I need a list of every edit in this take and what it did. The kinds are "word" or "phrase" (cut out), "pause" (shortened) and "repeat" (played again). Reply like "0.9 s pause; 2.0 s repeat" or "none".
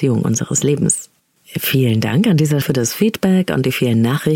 2.6 s word